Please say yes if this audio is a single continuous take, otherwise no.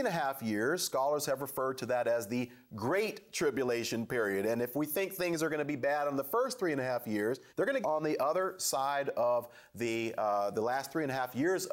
no